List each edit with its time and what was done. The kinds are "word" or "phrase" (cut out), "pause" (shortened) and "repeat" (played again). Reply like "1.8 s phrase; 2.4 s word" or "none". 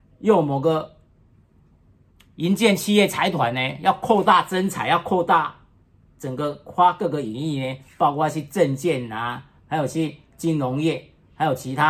none